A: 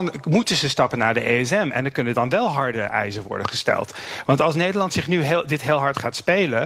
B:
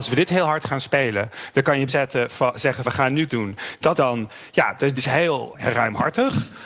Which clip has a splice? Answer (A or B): B